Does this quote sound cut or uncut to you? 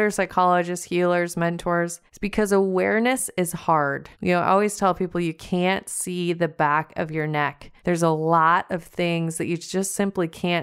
cut